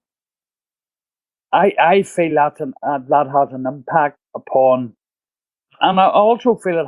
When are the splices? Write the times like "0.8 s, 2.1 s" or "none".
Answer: none